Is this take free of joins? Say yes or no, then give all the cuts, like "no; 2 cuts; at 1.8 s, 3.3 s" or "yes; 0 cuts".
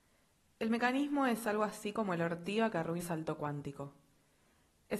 no; 1 cut; at 3.0 s